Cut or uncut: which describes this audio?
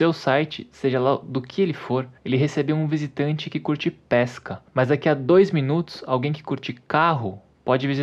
cut